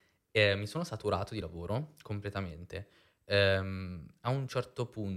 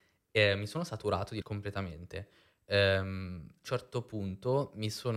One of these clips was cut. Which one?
second; 2 cuts; at 1.4 s, 3.6 s

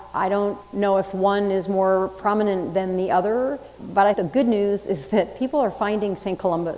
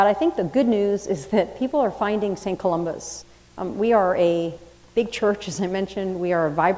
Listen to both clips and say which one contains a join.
first; 2 cuts; at 3.8 s, 4.1 s

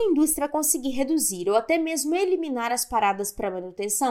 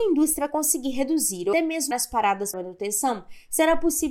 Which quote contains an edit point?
second; 3 cuts; at 1.5 s, 1.9 s, 2.5 s

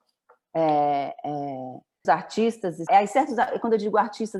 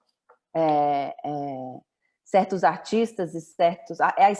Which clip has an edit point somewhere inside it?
first; 2 cuts; at 2.0 s, 2.9 s

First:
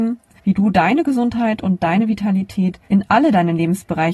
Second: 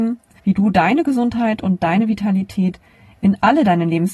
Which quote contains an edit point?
first; 1 cut; at 2.9 s

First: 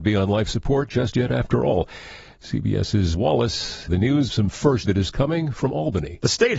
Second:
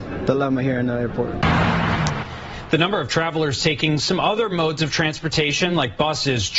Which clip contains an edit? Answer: first; 4 cuts; at 3.1 s, 3.9 s, 4.3 s, 4.8 s

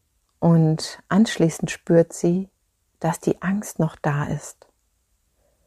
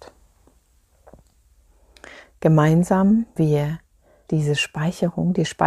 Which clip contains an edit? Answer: second; 2 cuts; at 3.4 s, 4.3 s

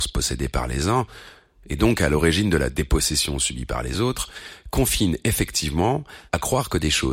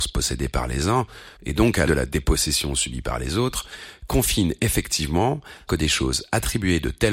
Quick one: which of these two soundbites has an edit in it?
second; 3 cuts; at 1.4 s, 1.9 s, 5.7 s

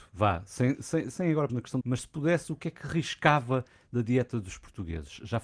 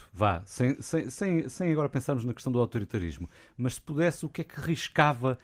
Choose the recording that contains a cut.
first; 3 cuts; at 1.1 s, 1.5 s, 1.8 s

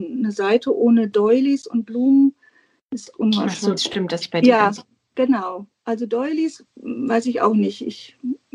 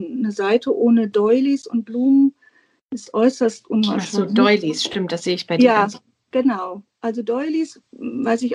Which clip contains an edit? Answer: first; 3 cuts; at 3.1 s, 3.8 s, 4.2 s

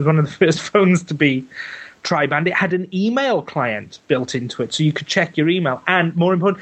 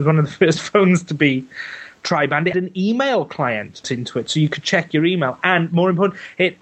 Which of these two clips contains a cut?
second; 2 cuts; at 2.5 s, 3.8 s

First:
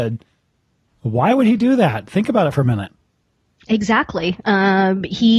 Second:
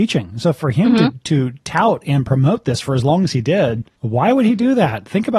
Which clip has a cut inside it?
second; 1 cut; at 4.0 s

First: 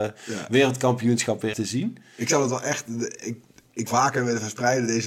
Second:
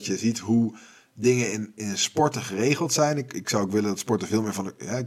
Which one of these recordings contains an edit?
first; 2 cuts; at 1.5 s, 3.9 s

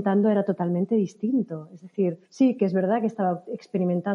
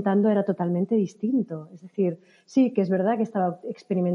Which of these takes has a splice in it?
first; 1 cut; at 2.3 s

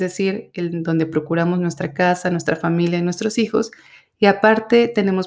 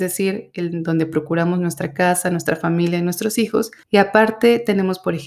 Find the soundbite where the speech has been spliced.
second; 1 cut; at 3.8 s

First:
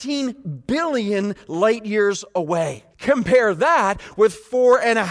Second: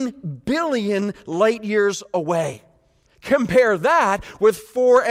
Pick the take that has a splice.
first; 1 cut; at 2.9 s

